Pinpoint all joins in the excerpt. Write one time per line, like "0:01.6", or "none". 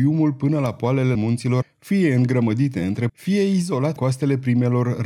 0:01.1
0:01.6
0:03.1
0:04.0